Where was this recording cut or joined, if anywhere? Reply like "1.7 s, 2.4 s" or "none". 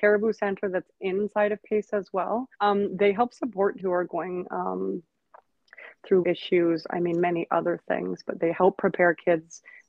2.5 s, 3.8 s, 6.2 s